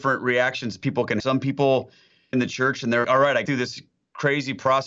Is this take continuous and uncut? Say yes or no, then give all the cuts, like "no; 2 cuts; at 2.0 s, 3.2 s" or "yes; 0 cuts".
no; 4 cuts; at 1.2 s, 2.3 s, 3.0 s, 3.4 s